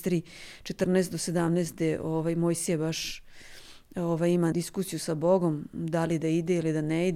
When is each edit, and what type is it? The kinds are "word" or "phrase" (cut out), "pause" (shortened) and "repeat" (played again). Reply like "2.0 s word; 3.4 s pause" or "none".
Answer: 4.5 s word